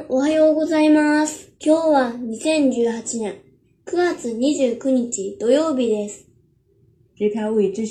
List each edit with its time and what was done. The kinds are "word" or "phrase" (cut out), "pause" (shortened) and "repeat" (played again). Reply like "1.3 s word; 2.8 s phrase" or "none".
1.6 s pause

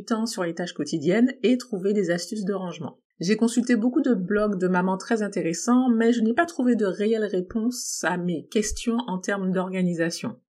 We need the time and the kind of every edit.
3.1 s pause

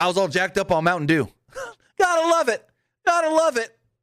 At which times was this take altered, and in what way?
none

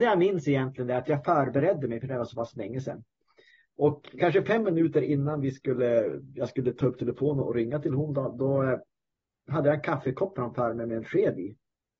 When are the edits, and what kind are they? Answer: none

